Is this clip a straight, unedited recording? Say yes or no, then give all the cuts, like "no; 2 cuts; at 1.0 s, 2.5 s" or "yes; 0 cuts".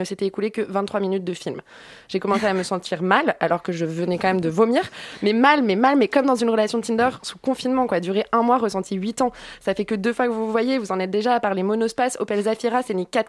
yes; 0 cuts